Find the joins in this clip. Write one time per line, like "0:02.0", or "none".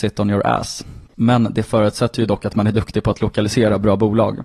0:01.1